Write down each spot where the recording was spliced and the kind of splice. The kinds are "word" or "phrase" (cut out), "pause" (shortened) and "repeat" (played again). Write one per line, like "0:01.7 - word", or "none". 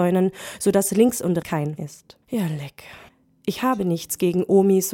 0:01.4 - word
0:01.8 - word
0:02.2 - pause
0:03.1 - pause